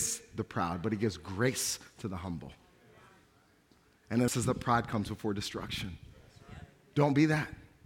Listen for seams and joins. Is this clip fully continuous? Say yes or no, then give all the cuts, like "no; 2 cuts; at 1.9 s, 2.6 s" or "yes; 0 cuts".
no; 1 cut; at 4.3 s